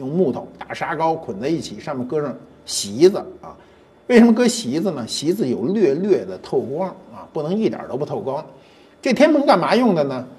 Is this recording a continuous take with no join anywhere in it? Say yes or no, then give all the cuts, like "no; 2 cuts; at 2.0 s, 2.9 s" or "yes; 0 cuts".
yes; 0 cuts